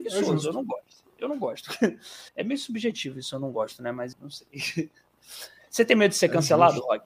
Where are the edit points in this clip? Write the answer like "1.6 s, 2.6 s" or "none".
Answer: 2.3 s, 4.1 s